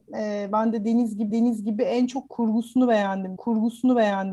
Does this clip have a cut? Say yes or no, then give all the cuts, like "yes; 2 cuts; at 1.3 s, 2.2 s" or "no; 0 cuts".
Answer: yes; 2 cuts; at 1.3 s, 3.4 s